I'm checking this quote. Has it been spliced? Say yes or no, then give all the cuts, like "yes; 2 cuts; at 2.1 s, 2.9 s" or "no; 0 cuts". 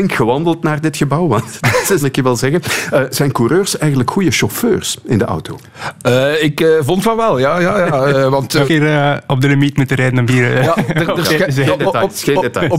yes; 2 cuts; at 2.0 s, 8.7 s